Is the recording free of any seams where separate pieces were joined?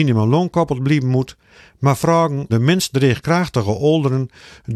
no; 1 cut; at 2.5 s

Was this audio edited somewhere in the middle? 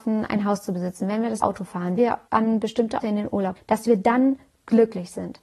yes; 5 cuts; at 1.4 s, 2.0 s, 2.3 s, 3.0 s, 3.6 s

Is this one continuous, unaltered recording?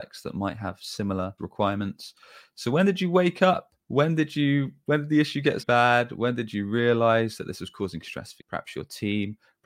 no; 4 cuts; at 1.4 s, 3.8 s, 5.6 s, 8.4 s

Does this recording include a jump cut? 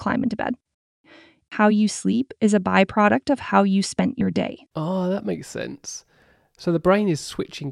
yes; 1 cut; at 4.7 s

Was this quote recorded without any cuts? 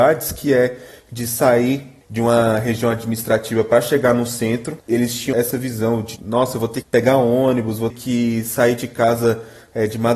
no; 6 cuts; at 2.0 s, 4.8 s, 5.3 s, 6.2 s, 6.8 s, 7.9 s

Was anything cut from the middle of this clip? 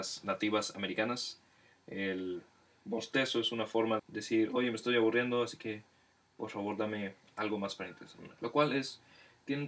yes; 2 cuts; at 4.0 s, 8.4 s

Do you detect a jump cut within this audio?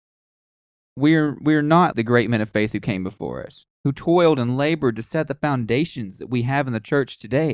yes; 1 cut; at 1.9 s

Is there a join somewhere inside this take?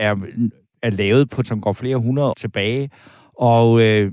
yes; 2 cuts; at 1.4 s, 2.3 s

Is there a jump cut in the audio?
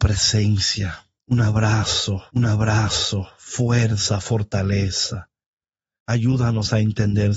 yes; 1 cut; at 2.3 s

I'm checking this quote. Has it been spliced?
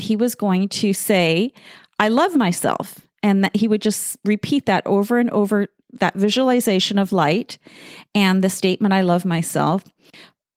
no; 0 cuts

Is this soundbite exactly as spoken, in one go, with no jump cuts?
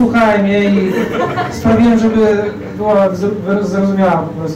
yes; 0 cuts

